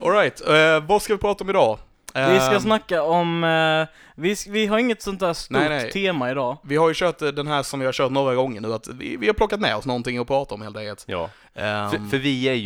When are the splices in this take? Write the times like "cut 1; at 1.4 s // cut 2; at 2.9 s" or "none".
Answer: none